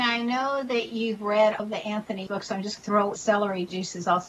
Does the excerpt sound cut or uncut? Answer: cut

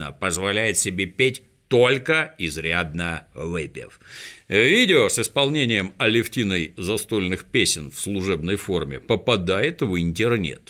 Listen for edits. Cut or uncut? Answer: uncut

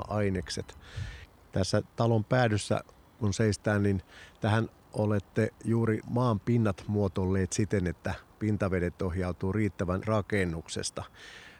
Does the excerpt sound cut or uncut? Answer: cut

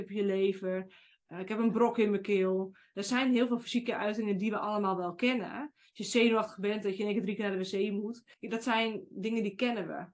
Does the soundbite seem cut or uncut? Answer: cut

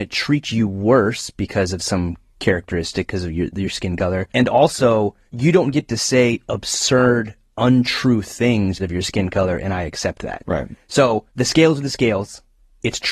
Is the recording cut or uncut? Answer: cut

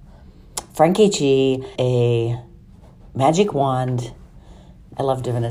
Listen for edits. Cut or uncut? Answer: cut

